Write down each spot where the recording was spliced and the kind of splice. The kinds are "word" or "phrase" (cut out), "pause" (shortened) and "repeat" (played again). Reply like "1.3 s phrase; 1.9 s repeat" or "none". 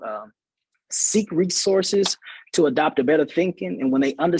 none